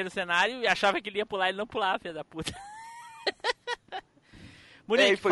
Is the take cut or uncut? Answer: uncut